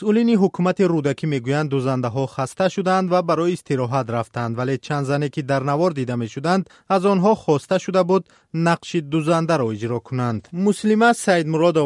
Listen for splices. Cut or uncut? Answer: uncut